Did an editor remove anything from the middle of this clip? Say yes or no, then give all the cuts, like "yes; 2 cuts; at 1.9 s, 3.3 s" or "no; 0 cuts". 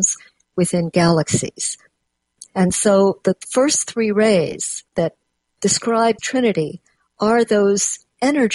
yes; 2 cuts; at 4.9 s, 6.2 s